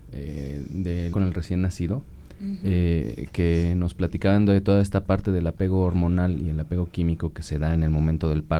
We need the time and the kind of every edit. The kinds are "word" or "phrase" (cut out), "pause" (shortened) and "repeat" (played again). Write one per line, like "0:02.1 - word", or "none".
0:01.1 - word